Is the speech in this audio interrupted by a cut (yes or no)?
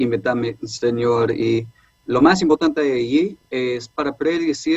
no